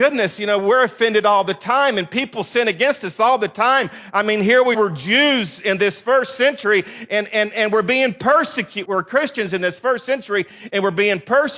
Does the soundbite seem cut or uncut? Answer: cut